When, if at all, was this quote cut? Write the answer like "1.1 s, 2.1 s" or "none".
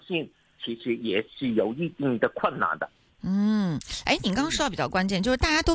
none